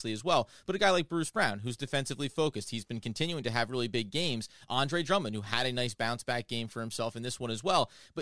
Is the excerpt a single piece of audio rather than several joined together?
yes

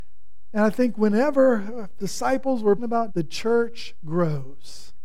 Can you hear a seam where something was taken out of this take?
yes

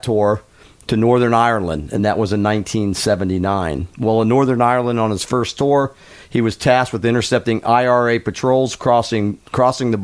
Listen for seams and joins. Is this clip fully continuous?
yes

